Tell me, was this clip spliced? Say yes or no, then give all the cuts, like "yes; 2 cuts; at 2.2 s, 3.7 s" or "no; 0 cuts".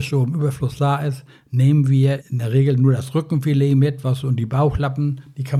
yes; 1 cut; at 2.2 s